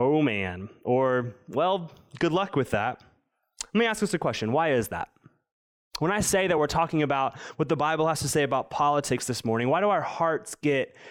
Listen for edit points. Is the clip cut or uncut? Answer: uncut